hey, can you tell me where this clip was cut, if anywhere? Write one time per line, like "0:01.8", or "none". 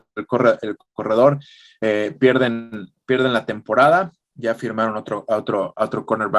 none